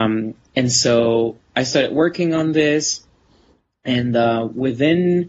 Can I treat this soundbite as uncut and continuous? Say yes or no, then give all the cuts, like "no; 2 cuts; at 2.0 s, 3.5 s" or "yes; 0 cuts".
yes; 0 cuts